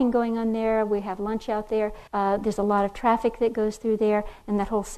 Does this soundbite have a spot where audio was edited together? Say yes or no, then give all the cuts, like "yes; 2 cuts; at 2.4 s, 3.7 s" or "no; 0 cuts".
yes; 1 cut; at 2.1 s